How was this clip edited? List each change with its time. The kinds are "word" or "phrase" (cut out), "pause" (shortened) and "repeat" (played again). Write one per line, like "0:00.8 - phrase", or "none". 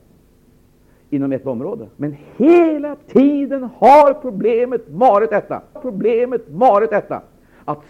0:01.4 - phrase
0:01.9 - pause
0:05.8 - repeat